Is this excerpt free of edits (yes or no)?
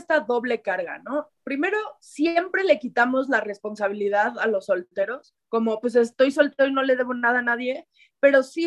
no